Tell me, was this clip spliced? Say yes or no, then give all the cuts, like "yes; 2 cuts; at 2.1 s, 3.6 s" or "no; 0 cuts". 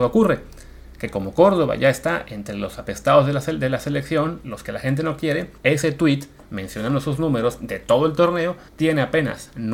yes; 2 cuts; at 5.6 s, 8.7 s